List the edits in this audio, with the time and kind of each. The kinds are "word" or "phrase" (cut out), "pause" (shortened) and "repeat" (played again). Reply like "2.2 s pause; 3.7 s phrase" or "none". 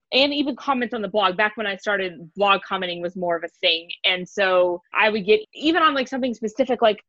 4.9 s word; 5.4 s word